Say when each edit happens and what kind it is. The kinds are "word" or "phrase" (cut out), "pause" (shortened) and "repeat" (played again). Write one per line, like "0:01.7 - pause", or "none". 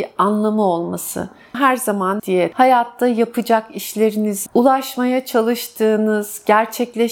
0:01.5 - word
0:02.2 - word
0:02.5 - word
0:04.5 - word